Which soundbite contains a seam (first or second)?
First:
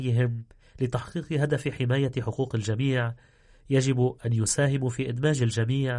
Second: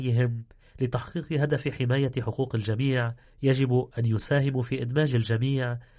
second